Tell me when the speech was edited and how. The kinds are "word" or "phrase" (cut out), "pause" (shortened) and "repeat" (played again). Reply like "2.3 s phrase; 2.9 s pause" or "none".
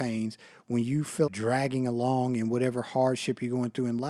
1.3 s phrase